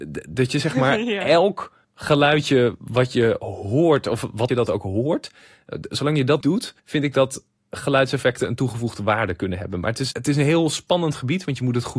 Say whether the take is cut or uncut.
cut